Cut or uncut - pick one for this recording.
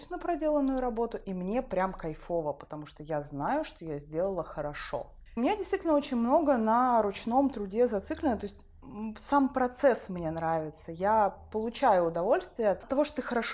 uncut